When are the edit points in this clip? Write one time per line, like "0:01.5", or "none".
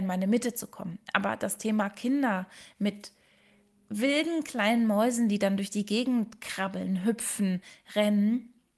none